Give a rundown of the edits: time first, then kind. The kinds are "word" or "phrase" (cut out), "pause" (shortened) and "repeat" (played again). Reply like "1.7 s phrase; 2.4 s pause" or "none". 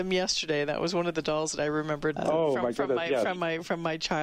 2.2 s word